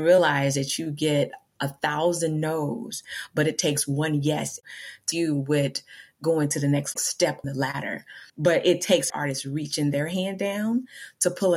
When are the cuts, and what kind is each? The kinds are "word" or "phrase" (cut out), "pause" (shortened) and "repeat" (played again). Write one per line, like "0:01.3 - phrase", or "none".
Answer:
0:05.1 - word
0:07.4 - word
0:08.3 - pause
0:09.1 - word

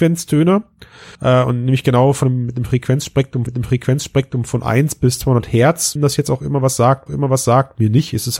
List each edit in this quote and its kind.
0:01.1 - pause
0:03.5 - repeat
0:06.0 - word
0:07.1 - repeat

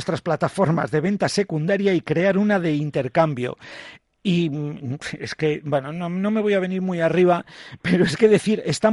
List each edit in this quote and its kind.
none

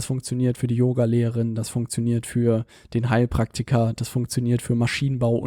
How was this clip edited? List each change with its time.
none

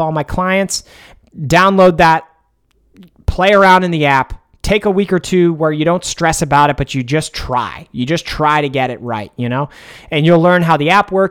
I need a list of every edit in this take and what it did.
none

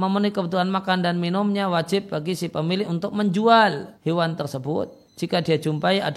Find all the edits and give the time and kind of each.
0:03.9 - pause
0:05.1 - pause

